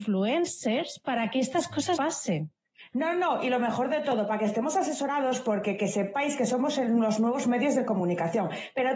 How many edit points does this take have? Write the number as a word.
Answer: one